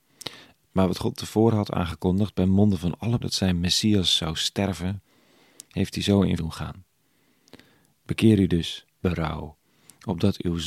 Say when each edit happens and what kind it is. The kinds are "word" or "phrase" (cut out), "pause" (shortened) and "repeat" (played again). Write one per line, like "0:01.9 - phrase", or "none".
0:03.2 - word
0:06.4 - word
0:09.0 - word